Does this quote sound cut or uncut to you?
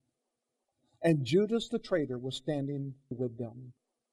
cut